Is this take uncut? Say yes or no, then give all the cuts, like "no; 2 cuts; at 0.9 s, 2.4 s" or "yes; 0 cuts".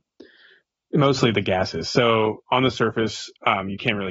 yes; 0 cuts